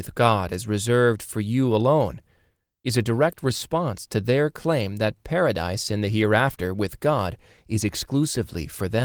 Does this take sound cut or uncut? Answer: uncut